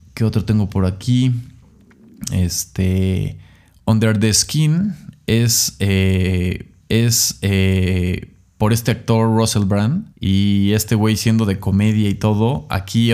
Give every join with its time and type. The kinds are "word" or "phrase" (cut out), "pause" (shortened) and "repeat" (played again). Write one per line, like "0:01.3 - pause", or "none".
0:06.8 - repeat
0:10.1 - pause